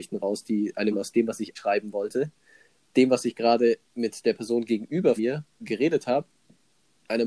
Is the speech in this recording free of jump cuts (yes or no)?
no